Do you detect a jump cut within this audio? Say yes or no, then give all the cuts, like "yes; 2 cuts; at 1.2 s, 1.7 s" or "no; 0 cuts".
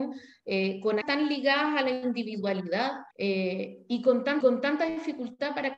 yes; 3 cuts; at 1.0 s, 3.1 s, 4.4 s